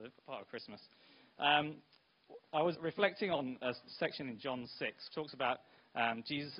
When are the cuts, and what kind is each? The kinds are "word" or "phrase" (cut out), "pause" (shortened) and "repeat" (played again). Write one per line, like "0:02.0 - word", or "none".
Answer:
0:02.7 - word
0:03.6 - word
0:05.1 - word